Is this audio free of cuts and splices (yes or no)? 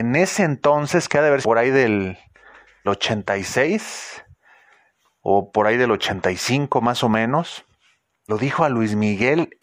no